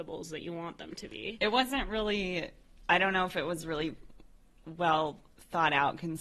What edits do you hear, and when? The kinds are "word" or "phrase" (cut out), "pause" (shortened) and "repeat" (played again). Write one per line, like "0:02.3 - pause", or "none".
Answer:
none

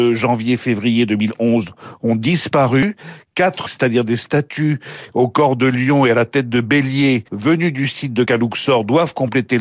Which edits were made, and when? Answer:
0:03.7 - word
0:07.3 - pause
0:08.2 - word

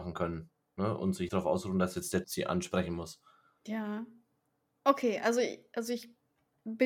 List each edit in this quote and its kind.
0:01.3 - word
0:02.2 - word

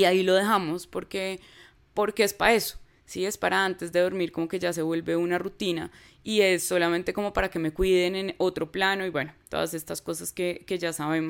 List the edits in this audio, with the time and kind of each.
none

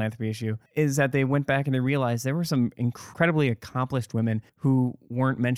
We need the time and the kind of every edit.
none

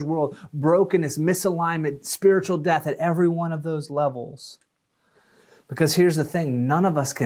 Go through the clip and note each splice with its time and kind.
none

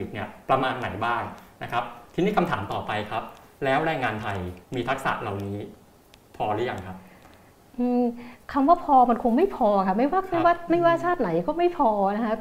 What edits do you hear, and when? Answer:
0:04.6 - pause
0:08.4 - pause

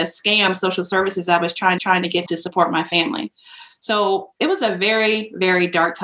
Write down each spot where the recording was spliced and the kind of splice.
0:01.8 - repeat
0:02.3 - word

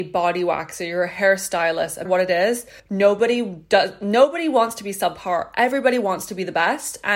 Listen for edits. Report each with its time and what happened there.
0:02.1 - phrase
0:02.8 - pause

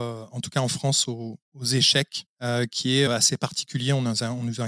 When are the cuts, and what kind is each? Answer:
0:01.4 - pause
0:03.1 - word

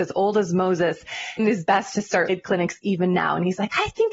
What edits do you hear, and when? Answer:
0:01.4 - phrase
0:02.3 - word

